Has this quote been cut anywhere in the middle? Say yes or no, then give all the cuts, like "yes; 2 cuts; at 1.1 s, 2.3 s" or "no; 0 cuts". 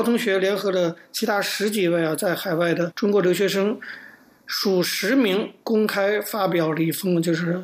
no; 0 cuts